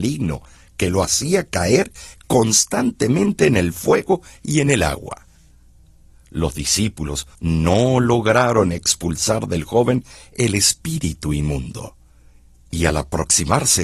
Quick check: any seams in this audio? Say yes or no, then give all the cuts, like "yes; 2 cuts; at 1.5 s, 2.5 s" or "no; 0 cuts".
yes; 1 cut; at 7.3 s